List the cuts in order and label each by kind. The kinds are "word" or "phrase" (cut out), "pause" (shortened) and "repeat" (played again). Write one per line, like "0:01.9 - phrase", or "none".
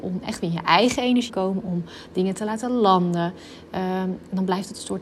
0:01.3 - word